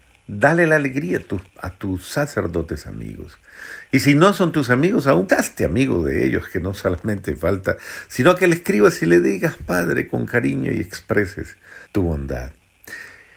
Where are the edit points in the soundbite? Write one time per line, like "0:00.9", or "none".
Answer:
0:01.5
0:05.3
0:11.9

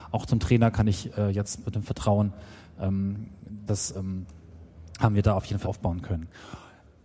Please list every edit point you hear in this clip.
0:03.7
0:05.6

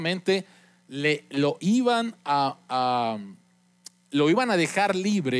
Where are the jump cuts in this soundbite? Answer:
0:01.6

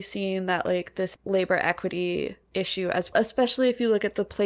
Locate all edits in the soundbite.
0:01.1
0:02.4
0:03.1

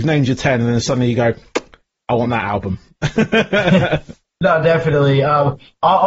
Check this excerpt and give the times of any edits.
none

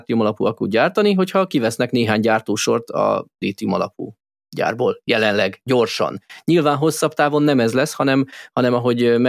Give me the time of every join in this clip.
none

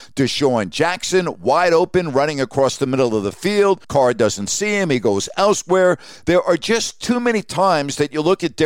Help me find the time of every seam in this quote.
0:03.8

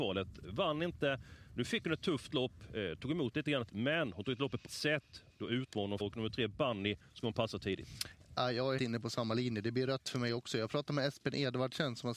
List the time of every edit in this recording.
0:03.7
0:04.6
0:06.0
0:08.8

